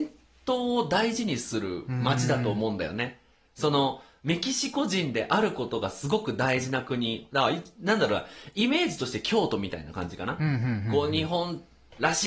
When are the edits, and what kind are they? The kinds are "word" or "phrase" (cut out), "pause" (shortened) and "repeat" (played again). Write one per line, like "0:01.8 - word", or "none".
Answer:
none